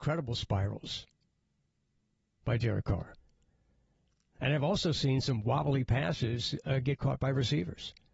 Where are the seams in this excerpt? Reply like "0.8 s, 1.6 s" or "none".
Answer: none